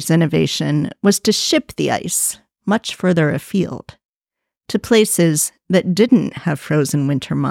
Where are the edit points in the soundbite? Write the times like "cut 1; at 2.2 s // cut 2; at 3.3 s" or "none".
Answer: none